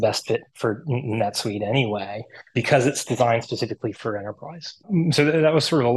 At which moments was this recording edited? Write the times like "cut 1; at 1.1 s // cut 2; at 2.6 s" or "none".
cut 1; at 2.5 s // cut 2; at 3.9 s